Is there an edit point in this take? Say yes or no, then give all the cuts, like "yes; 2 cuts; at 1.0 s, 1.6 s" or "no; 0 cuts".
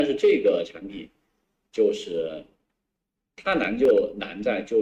yes; 1 cut; at 3.2 s